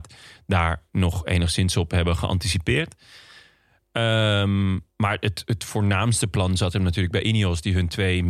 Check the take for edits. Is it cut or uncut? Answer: uncut